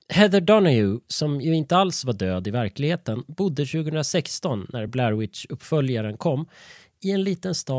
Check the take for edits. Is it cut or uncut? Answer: uncut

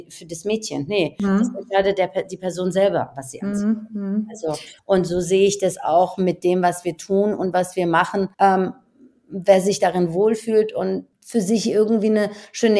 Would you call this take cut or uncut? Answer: cut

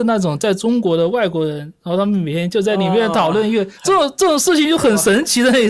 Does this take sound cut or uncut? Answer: cut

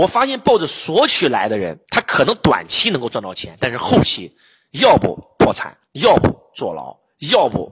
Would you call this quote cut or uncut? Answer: cut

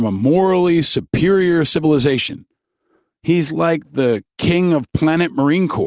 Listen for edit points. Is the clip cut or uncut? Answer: uncut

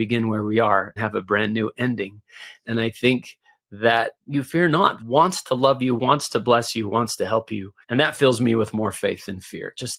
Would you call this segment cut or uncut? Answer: cut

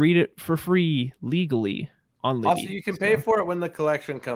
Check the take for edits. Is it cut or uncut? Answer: cut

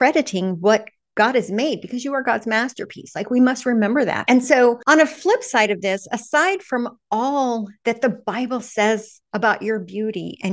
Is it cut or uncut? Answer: uncut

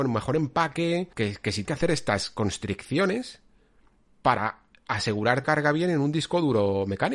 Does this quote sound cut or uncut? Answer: cut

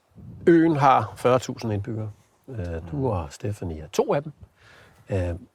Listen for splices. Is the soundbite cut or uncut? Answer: uncut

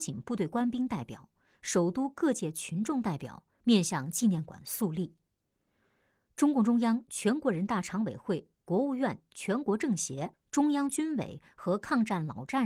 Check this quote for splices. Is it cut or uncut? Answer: uncut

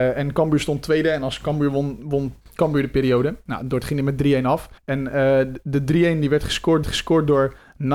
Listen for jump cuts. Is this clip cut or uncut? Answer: cut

